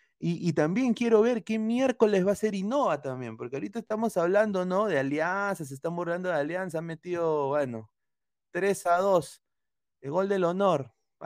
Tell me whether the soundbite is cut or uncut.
uncut